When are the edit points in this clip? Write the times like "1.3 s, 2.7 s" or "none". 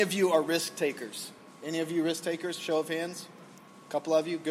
none